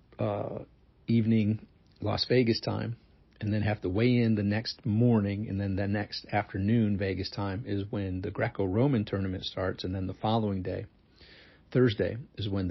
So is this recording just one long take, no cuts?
yes; 0 cuts

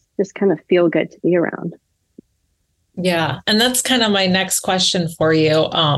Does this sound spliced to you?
no; 0 cuts

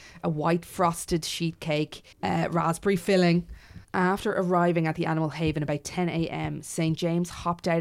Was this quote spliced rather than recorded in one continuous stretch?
yes; 2 cuts; at 2.1 s, 3.8 s

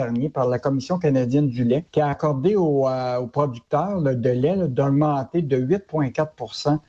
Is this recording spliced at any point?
yes; 1 cut; at 1.9 s

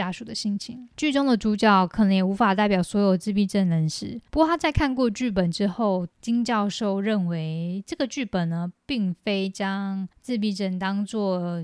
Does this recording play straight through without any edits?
no; 3 cuts; at 4.3 s, 6.1 s, 10.1 s

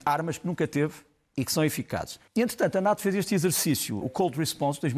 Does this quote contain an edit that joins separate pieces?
yes; 2 cuts; at 2.3 s, 4.0 s

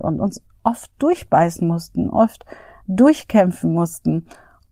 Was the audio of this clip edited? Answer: no; 0 cuts

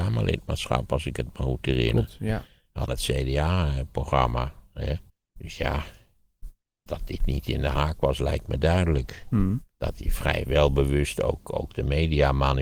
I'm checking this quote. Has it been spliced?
yes; 3 cuts; at 2.9 s, 5.1 s, 6.9 s

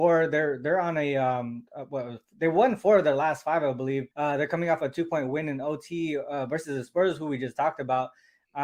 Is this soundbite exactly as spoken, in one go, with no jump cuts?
no; 2 cuts; at 1.7 s, 4.1 s

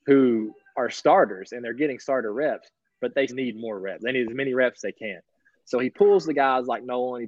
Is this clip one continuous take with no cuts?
no; 1 cut; at 3.3 s

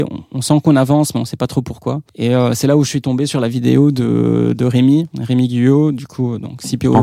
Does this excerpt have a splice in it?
yes; 2 cuts; at 2.1 s, 5.1 s

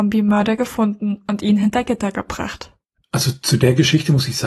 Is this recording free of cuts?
yes; 0 cuts

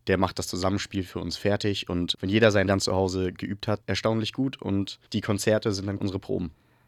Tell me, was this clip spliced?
yes; 5 cuts; at 2.1 s, 2.7 s, 3.8 s, 5.1 s, 6.0 s

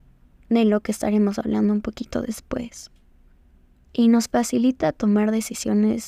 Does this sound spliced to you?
no; 0 cuts

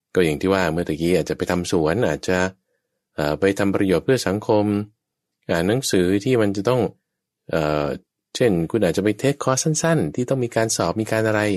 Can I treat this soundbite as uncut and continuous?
yes; 0 cuts

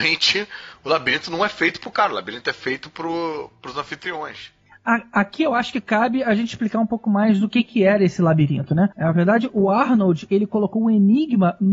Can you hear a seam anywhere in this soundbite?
yes; 1 cut; at 8.9 s

